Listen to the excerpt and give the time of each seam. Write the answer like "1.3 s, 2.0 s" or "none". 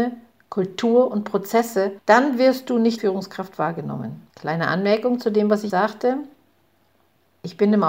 3.0 s, 4.3 s, 5.7 s